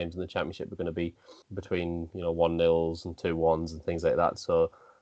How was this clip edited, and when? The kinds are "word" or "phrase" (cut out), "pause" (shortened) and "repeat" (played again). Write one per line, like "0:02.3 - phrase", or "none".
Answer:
0:01.4 - pause